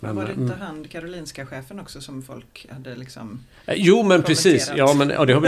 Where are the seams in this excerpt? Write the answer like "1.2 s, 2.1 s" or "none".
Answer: none